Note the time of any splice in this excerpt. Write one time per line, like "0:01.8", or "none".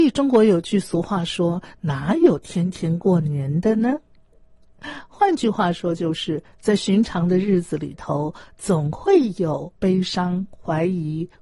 0:09.7

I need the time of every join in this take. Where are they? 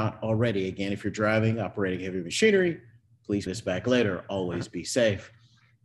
0:03.5

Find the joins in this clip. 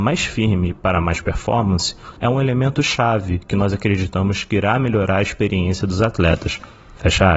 0:02.2

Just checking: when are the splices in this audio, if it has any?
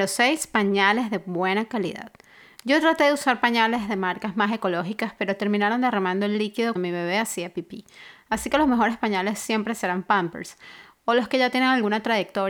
0:06.8

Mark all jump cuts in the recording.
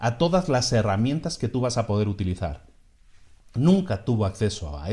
none

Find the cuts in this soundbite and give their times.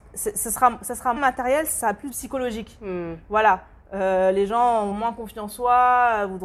0:01.2
0:02.1
0:04.9
0:05.5

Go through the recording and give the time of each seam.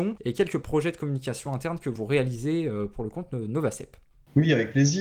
none

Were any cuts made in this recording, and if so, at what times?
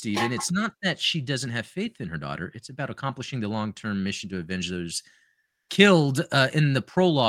none

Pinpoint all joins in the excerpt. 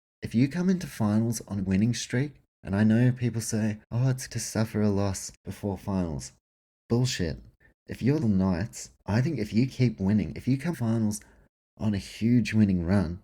0:01.6
0:02.5
0:03.8
0:04.3
0:05.3
0:08.2
0:09.0
0:09.7
0:10.7

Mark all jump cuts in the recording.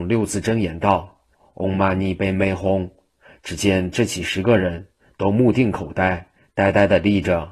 none

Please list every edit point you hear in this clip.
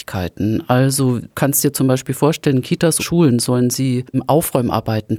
0:01.3
0:03.0
0:04.1

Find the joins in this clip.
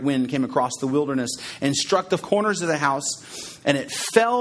0:02.2

